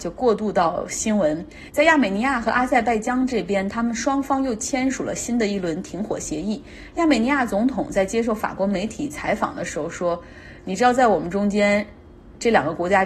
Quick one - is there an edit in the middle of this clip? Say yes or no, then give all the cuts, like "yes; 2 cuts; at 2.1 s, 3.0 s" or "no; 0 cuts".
no; 0 cuts